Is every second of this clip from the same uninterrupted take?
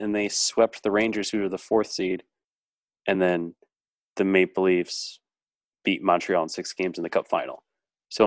yes; 0 cuts

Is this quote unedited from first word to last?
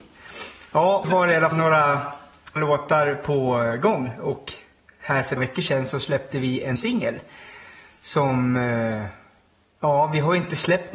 no; 5 cuts; at 1.0 s, 1.5 s, 2.6 s, 5.4 s, 6.8 s

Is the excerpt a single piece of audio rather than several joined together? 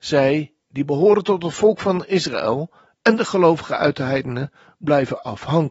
yes; 0 cuts

